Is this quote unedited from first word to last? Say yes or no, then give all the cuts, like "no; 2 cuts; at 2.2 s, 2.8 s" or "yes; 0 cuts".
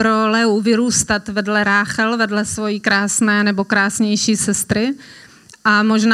yes; 0 cuts